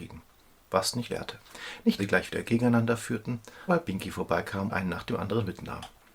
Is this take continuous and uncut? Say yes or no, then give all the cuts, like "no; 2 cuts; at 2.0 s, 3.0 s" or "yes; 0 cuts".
no; 5 cuts; at 1.1 s, 2.0 s, 2.4 s, 3.7 s, 4.7 s